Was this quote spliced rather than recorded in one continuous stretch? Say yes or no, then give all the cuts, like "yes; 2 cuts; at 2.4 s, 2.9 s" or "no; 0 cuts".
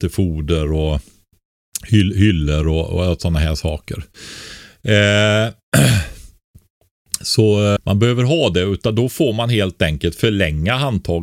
yes; 1 cut; at 7.8 s